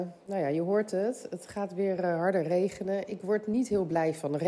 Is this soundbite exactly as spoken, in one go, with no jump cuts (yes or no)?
yes